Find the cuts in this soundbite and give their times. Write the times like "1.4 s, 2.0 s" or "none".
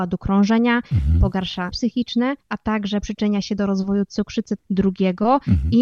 1.7 s, 2.4 s, 4.6 s

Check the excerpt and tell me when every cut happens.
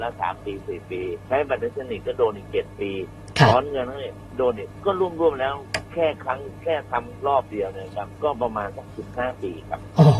1.2 s, 4.8 s, 8.2 s

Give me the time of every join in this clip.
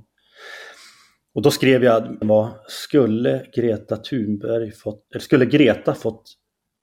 2.2 s, 5.1 s

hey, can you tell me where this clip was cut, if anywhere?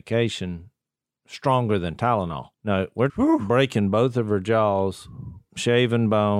2.5 s, 3.1 s

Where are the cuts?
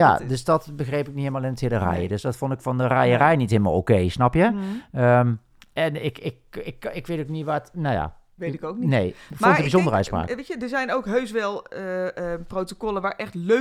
8.4 s

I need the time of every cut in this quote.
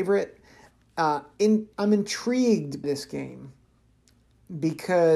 1.7 s, 2.8 s

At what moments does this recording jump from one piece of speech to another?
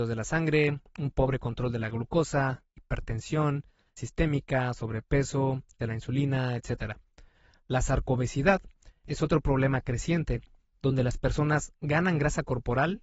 4.0 s, 5.8 s

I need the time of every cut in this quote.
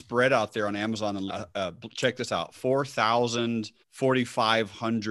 1.3 s, 3.8 s

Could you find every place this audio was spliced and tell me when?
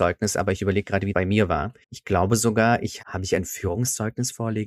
1.1 s, 1.8 s, 3.0 s

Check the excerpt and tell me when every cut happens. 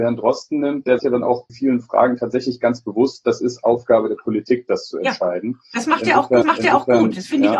1.0 s, 1.5 s, 6.4 s

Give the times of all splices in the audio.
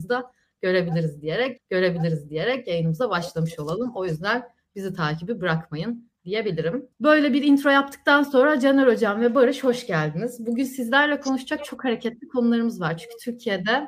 1.6 s, 6.9 s

